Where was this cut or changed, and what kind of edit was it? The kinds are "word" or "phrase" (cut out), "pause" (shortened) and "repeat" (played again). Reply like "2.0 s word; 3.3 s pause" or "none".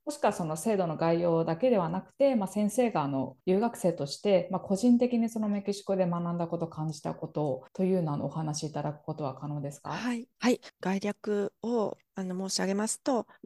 3.4 s pause; 7.7 s pause; 10.3 s pause